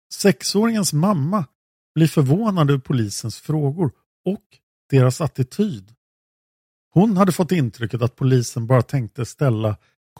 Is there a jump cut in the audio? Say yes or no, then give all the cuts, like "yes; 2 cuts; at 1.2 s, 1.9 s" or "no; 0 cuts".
no; 0 cuts